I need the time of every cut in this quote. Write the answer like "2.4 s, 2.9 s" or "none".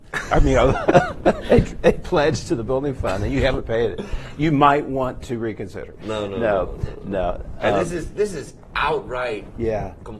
none